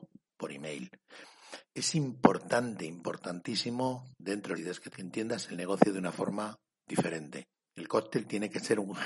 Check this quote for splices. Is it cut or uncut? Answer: cut